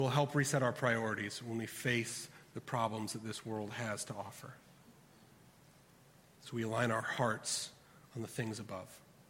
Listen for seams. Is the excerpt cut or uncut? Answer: uncut